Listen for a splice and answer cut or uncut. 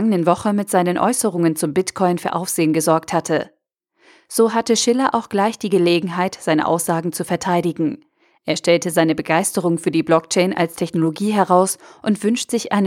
uncut